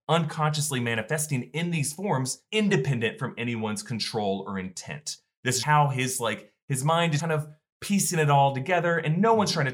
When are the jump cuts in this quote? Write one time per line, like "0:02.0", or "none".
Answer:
0:02.5
0:05.6
0:07.2